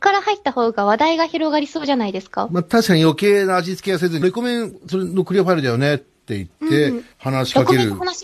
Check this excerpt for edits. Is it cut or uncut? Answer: cut